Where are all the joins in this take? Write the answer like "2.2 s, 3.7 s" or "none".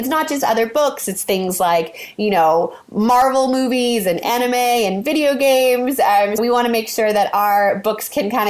6.4 s